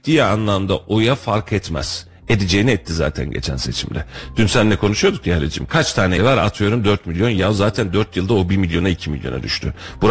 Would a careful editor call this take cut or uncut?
cut